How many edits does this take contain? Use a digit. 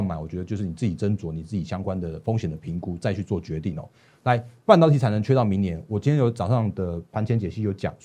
0